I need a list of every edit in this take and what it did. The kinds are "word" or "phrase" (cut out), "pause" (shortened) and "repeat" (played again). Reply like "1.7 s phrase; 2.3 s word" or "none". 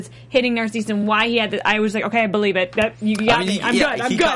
none